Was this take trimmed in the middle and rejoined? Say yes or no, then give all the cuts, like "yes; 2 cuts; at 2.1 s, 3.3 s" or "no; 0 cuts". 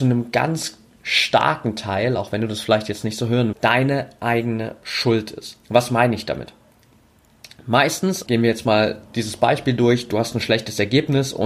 yes; 4 cuts; at 3.5 s, 5.6 s, 8.3 s, 9.1 s